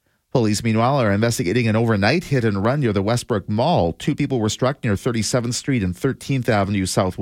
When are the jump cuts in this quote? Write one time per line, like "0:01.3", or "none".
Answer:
none

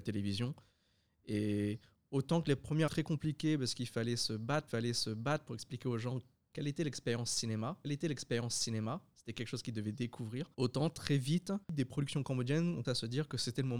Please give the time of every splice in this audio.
0:02.9
0:04.7
0:07.8
0:10.5
0:11.6
0:12.8

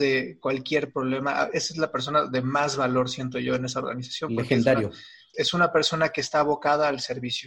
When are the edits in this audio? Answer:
0:05.3

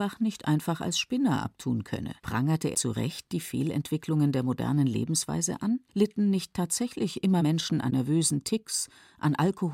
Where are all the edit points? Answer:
0:02.2
0:02.7
0:05.9
0:07.4
0:07.9

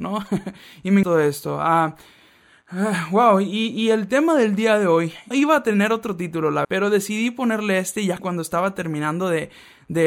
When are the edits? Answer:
0:01.0
0:05.3
0:06.6
0:08.2

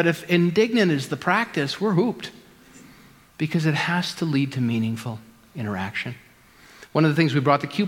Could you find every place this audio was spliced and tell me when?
none

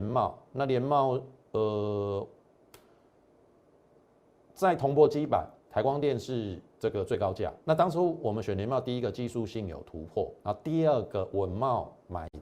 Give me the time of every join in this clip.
0:05.6
0:06.7
0:07.6
0:10.4

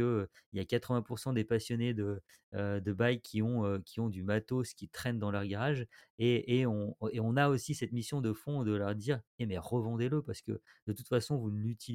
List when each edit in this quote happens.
none

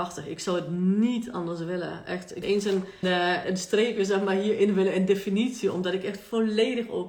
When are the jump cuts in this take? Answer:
0:02.4
0:03.0
0:03.4

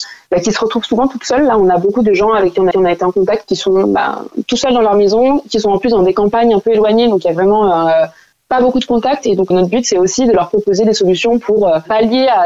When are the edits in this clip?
0:02.7
0:09.5

